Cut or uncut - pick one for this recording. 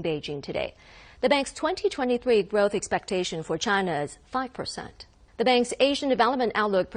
cut